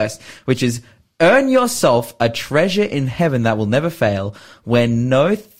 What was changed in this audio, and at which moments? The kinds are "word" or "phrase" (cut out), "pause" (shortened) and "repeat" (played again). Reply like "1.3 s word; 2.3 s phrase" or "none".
none